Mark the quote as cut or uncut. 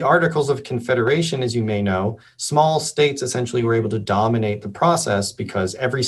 uncut